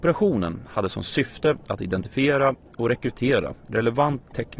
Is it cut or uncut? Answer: uncut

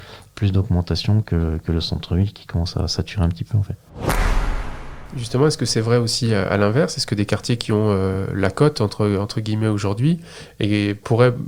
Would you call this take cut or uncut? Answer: uncut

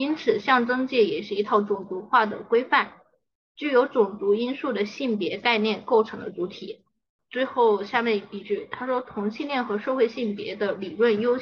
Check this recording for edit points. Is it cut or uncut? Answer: uncut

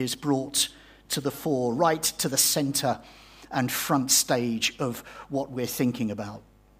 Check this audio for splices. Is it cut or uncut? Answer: uncut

